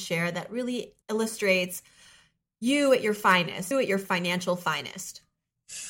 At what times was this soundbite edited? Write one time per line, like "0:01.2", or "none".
0:01.0
0:03.7